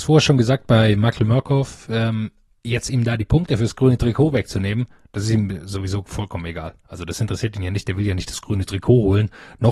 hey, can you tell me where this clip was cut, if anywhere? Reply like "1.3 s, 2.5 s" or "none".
none